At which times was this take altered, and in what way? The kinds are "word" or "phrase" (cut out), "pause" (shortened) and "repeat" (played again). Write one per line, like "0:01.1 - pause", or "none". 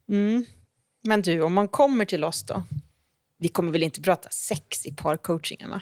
none